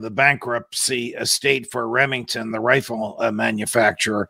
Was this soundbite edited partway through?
no; 0 cuts

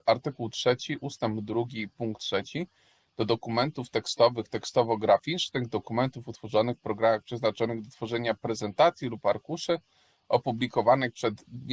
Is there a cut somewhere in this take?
no; 0 cuts

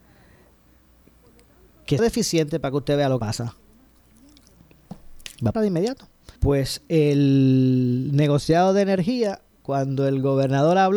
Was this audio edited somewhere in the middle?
yes; 5 cuts; at 2.0 s, 3.2 s, 5.5 s, 6.4 s, 9.6 s

